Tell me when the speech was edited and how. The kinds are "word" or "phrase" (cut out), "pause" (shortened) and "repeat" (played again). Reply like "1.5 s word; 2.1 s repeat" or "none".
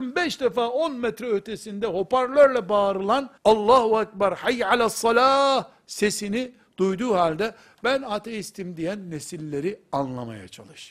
3.4 s pause